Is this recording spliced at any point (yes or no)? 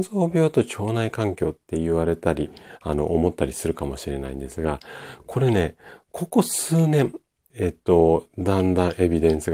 yes